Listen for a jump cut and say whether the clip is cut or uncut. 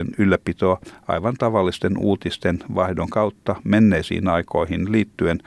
uncut